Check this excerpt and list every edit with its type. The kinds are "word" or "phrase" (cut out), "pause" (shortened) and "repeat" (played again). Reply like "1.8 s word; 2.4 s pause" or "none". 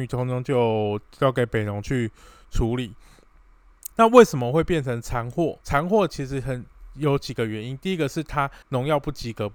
3.9 s pause; 5.6 s pause; 8.6 s pause

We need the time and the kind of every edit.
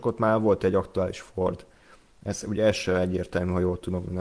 none

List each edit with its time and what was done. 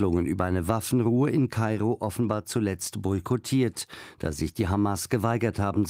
none

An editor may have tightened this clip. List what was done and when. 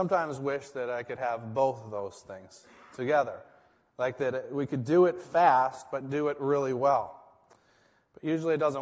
none

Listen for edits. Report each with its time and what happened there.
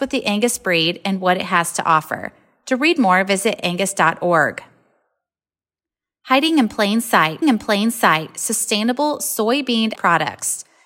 7.4 s repeat; 9.9 s word

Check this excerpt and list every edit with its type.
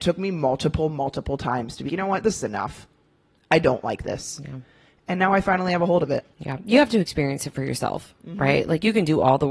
1.9 s word; 6.3 s pause

